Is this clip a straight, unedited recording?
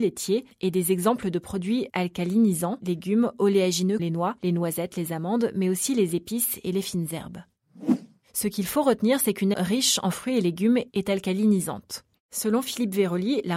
no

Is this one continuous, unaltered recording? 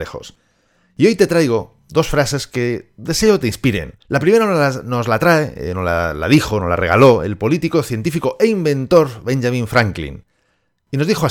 no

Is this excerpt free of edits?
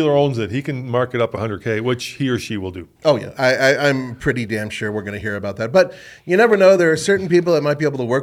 yes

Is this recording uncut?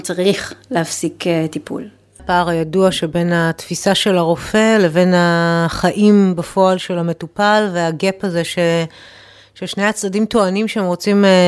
yes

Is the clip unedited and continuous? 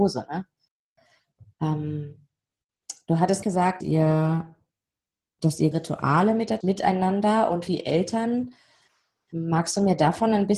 no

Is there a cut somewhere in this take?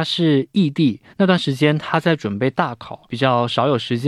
yes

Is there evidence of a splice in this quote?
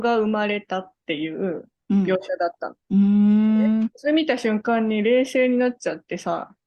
yes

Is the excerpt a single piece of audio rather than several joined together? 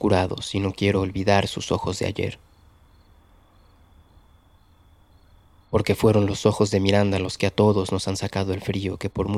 yes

